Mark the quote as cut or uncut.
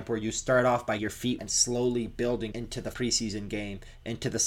cut